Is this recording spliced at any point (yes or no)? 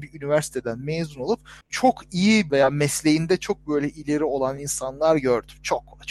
yes